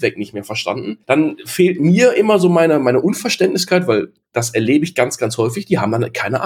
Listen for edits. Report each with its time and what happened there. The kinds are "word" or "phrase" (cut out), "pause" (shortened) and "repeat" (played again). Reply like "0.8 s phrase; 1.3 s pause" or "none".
1.0 s pause

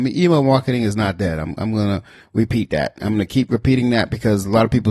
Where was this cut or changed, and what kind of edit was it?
none

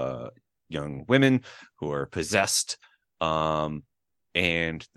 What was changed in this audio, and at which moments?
none

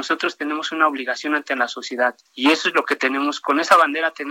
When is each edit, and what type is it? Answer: 2.3 s pause

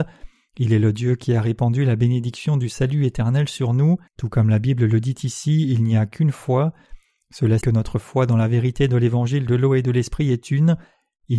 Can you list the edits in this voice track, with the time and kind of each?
4.1 s pause; 7.6 s word

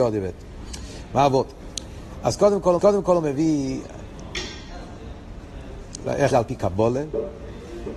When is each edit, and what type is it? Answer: 2.8 s repeat; 6.3 s word

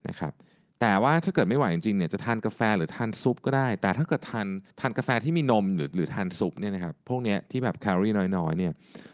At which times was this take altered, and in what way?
4.7 s pause; 7.0 s pause

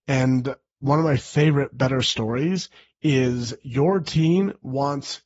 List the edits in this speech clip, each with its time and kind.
none

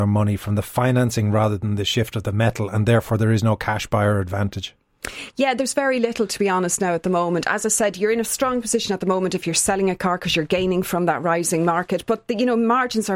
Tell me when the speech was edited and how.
none

